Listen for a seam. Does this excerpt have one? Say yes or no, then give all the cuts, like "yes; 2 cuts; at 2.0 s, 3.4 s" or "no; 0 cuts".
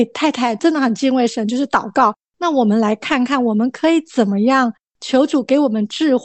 no; 0 cuts